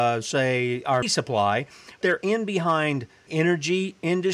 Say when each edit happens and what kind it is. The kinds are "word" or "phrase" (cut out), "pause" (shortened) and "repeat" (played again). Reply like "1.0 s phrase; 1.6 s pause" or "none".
1.0 s word; 2.0 s word; 3.3 s word